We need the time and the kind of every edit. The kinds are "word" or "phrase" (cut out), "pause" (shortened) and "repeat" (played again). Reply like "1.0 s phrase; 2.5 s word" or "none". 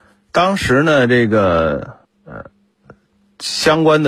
2.0 s pause